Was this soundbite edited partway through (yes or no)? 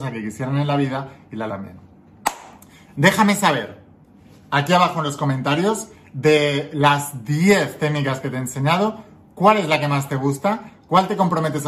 yes